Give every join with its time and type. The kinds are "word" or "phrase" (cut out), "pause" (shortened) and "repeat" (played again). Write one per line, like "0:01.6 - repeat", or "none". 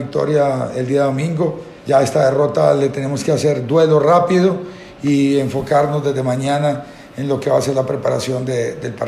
0:01.8 - pause